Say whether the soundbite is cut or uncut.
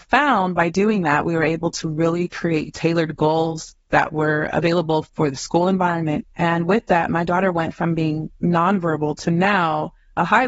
cut